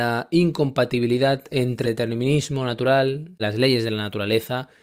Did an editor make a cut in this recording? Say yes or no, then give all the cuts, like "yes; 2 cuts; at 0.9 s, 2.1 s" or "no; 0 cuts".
yes; 2 cuts; at 1.8 s, 3.4 s